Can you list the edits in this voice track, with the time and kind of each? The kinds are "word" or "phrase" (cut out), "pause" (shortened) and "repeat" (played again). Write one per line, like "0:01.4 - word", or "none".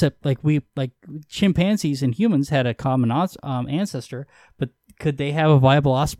none